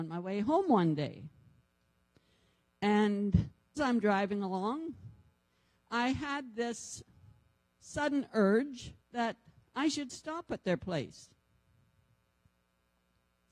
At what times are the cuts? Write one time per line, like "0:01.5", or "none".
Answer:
0:03.8
0:09.0